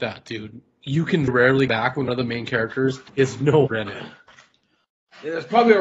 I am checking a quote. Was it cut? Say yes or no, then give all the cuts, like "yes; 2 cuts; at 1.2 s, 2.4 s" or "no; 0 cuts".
yes; 5 cuts; at 1.3 s, 1.7 s, 2.1 s, 3.1 s, 3.7 s